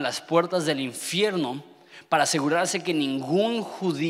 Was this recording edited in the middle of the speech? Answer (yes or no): no